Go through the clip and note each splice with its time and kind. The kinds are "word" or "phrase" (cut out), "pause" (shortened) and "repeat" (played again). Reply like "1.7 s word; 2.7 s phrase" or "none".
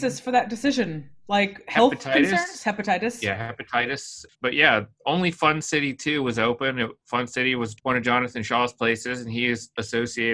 4.3 s pause; 7.8 s pause